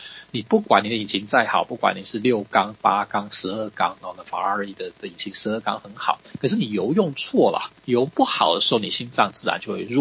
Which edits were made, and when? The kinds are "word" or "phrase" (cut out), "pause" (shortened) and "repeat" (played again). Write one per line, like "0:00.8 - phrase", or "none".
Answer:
0:07.8 - pause